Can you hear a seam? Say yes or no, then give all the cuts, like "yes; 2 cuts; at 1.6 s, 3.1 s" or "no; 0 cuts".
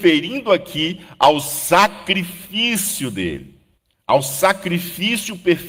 yes; 1 cut; at 3.8 s